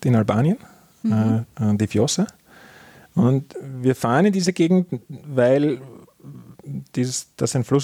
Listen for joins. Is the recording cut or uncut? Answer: uncut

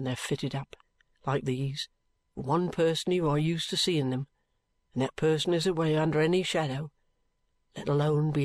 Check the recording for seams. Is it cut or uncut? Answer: uncut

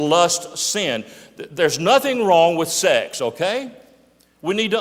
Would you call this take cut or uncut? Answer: uncut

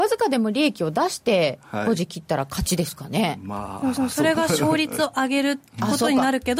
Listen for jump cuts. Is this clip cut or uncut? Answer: cut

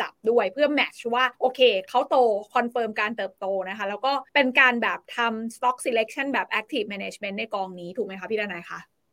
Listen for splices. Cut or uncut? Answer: cut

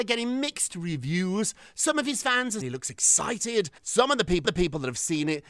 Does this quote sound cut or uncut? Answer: cut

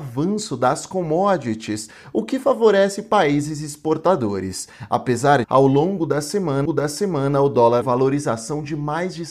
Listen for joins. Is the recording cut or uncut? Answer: cut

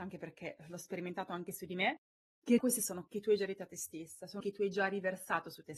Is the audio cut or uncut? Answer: cut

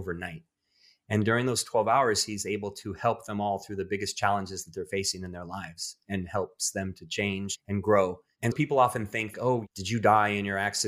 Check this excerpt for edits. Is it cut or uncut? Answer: cut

